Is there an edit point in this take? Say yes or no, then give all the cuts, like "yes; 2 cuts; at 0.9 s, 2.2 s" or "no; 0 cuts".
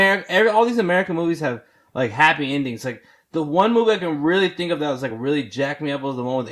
no; 0 cuts